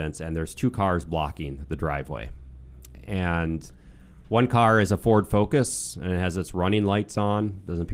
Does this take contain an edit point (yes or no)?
no